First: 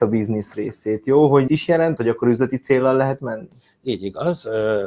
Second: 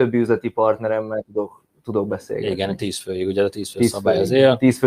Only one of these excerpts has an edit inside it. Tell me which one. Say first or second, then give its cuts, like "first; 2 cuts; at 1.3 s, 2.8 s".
first; 2 cuts; at 1.5 s, 2.0 s